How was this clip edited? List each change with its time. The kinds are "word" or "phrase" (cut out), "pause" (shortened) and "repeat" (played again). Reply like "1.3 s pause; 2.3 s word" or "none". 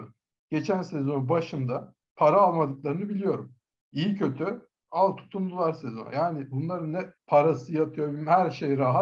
2.0 s pause; 7.2 s pause